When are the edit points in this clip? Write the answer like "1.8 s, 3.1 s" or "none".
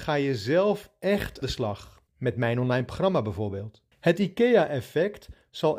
1.4 s, 2.1 s, 3.9 s